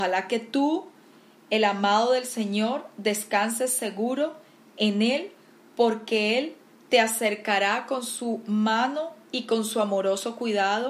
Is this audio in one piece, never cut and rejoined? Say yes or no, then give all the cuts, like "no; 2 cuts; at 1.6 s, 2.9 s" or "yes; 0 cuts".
yes; 0 cuts